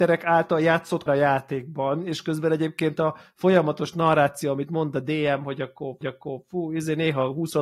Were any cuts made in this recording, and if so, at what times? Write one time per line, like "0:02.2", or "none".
0:01.1
0:06.0